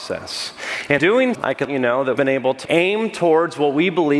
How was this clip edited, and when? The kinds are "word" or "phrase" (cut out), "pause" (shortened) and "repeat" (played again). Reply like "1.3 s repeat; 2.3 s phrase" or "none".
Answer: 1.0 s word; 1.3 s word; 1.6 s word; 2.1 s word; 2.6 s word